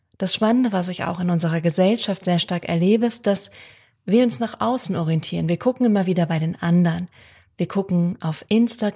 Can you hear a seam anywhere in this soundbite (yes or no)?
no